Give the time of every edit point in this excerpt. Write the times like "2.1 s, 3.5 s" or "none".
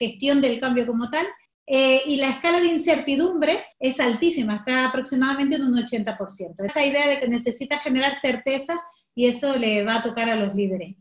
1.5 s, 3.7 s, 6.7 s, 7.2 s